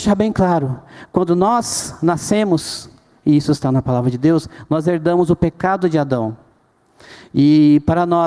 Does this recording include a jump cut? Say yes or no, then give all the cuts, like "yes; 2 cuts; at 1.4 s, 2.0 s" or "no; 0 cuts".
no; 0 cuts